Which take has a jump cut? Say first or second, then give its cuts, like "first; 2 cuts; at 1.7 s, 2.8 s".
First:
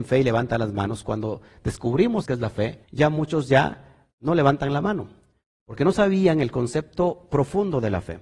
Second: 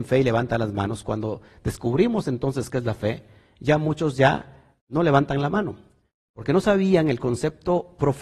first; 2 cuts; at 2.2 s, 2.8 s